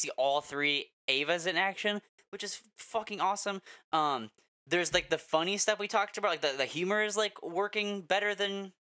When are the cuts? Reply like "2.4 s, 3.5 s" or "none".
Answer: none